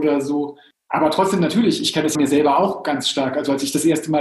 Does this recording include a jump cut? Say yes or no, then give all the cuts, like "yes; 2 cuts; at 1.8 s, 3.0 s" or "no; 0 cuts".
yes; 1 cut; at 2.1 s